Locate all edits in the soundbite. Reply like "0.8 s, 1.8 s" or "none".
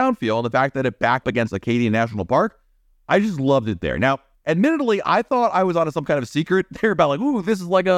1.2 s